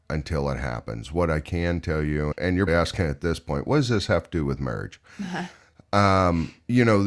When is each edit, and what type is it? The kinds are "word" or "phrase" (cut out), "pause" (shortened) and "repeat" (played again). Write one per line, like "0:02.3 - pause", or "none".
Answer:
0:02.3 - word
0:02.7 - word